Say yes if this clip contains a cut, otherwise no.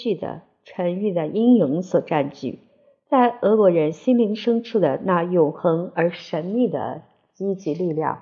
no